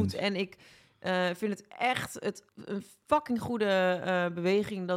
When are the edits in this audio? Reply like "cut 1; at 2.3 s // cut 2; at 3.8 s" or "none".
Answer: cut 1; at 2.5 s